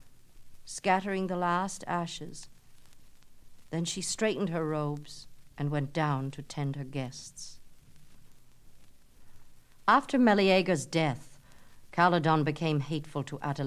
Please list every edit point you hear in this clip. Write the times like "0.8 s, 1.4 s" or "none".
5.5 s